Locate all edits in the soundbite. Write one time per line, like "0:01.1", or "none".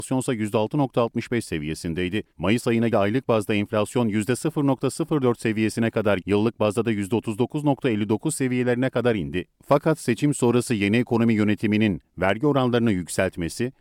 0:02.3
0:02.9
0:06.2